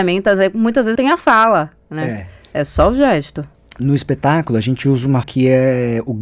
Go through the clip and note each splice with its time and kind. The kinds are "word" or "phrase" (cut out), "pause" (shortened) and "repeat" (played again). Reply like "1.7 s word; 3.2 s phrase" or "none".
1.0 s word; 5.2 s word